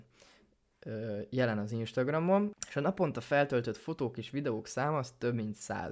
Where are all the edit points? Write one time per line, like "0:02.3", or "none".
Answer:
none